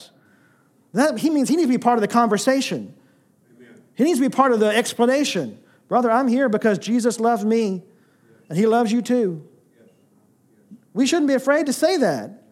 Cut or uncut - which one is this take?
uncut